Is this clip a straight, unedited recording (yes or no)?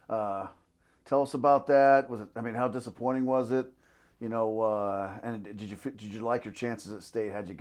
yes